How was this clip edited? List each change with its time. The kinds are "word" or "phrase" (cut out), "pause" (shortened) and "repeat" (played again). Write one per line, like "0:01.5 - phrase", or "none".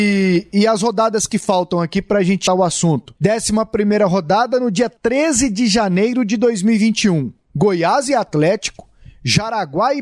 0:02.5 - word
0:03.2 - pause